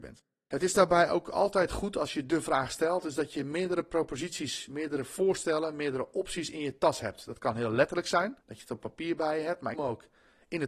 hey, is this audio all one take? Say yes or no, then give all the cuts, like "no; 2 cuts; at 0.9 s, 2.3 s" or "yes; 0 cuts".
no; 2 cuts; at 8.4 s, 9.7 s